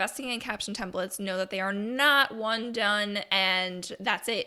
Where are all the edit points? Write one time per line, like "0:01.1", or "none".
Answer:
none